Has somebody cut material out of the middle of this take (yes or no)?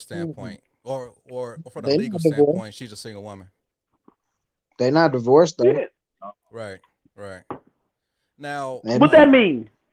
no